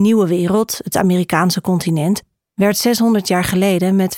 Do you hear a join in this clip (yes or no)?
no